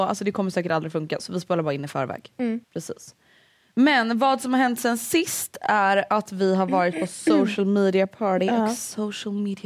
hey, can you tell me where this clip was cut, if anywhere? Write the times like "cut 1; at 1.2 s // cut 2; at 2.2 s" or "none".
cut 1; at 2.6 s